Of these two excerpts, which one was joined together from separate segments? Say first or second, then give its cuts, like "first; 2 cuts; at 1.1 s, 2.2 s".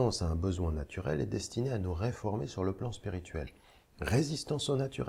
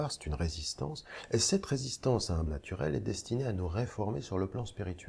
second; 1 cut; at 2.5 s